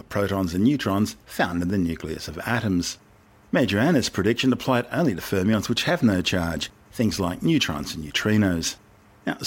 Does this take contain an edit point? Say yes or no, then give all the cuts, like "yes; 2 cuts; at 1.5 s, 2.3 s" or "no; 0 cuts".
no; 0 cuts